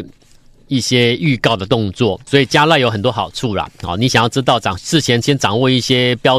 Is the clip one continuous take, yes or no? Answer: no